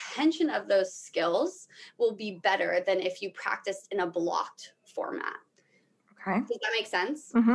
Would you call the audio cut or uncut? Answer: uncut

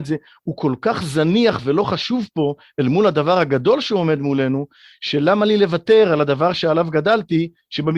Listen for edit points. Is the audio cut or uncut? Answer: uncut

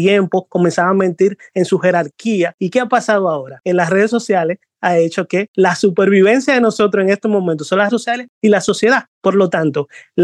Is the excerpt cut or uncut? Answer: cut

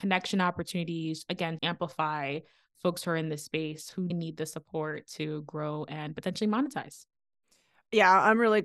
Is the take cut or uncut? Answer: cut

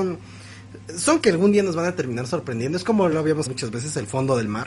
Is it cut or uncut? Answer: cut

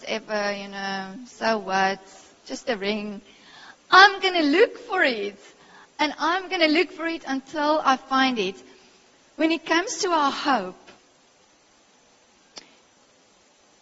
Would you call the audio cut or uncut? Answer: uncut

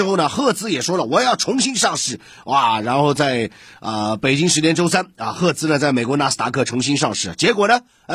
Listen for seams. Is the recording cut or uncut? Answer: uncut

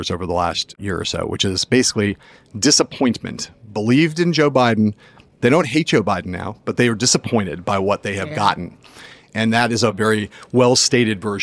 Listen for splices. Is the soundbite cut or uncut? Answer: uncut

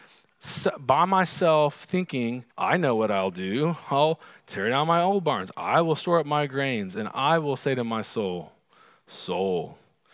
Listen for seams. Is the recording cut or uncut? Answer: cut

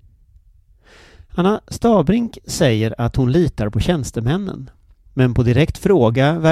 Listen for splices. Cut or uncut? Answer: uncut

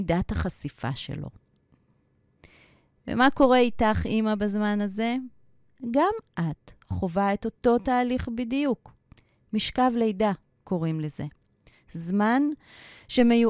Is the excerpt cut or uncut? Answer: uncut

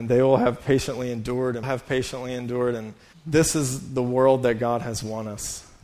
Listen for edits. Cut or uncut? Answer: cut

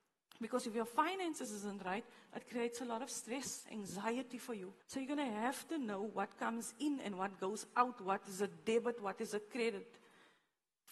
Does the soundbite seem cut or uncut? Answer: cut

